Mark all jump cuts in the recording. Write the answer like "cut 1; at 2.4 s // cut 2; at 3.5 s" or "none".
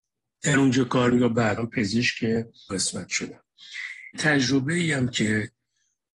cut 1; at 1.1 s // cut 2; at 1.6 s // cut 3; at 2.7 s // cut 4; at 4.1 s